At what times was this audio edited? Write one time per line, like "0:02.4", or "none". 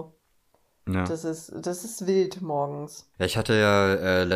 none

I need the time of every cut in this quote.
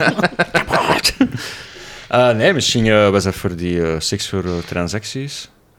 none

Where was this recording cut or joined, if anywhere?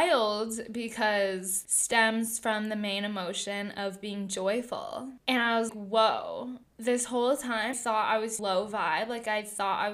0:01.7
0:05.7
0:07.7
0:08.4

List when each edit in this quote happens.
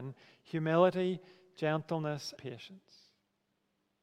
0:02.4

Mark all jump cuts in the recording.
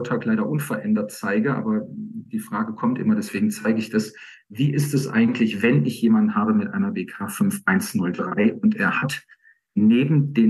none

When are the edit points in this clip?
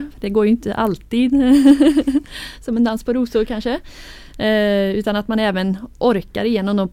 none

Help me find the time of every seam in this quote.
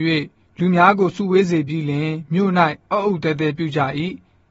0:02.8

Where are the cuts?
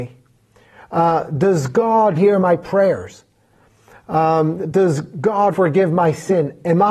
0:02.1
0:05.5

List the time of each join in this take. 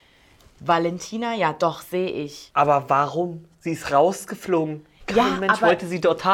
none

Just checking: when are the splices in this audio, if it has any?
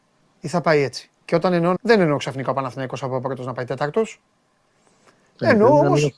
0:01.2
0:01.8

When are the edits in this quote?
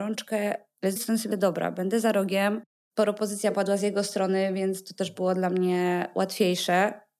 0:01.0
0:01.3

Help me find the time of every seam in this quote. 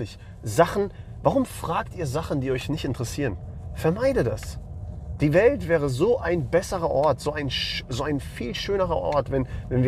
none

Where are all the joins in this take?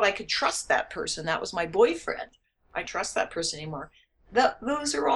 0:02.8

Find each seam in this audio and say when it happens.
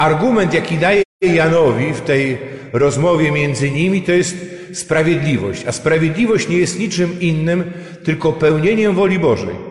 none

